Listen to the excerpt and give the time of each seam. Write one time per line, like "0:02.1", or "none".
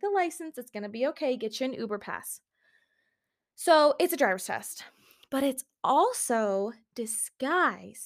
none